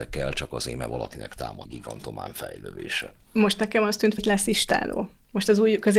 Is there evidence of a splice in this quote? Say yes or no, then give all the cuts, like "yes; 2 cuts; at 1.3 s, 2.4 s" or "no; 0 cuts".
yes; 2 cuts; at 1.7 s, 4.2 s